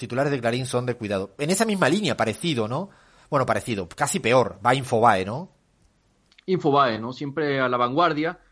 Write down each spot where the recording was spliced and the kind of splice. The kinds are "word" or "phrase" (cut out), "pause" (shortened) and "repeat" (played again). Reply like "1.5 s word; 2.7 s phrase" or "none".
none